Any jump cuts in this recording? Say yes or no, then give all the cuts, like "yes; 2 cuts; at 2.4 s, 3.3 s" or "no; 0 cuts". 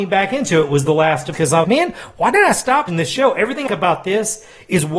yes; 4 cuts; at 1.3 s, 1.6 s, 2.9 s, 3.7 s